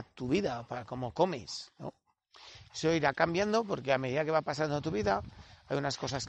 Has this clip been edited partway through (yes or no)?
no